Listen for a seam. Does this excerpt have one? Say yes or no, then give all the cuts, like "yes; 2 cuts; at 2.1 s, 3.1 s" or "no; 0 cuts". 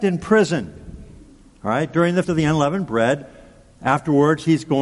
yes; 1 cut; at 2.2 s